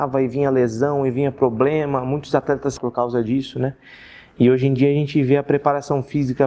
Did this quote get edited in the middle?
yes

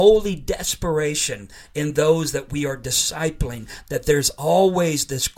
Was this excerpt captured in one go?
yes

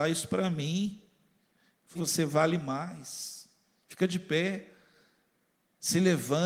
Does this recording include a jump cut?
yes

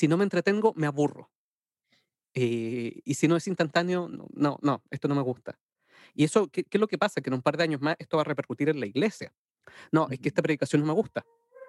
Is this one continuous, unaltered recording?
yes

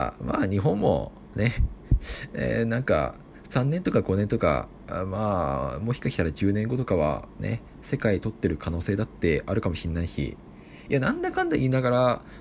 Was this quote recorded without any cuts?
yes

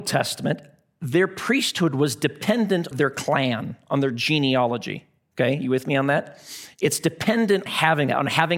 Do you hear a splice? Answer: yes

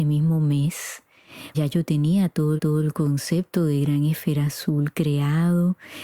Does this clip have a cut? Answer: yes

